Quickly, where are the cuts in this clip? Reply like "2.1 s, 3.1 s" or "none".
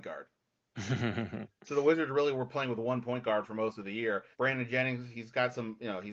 4.3 s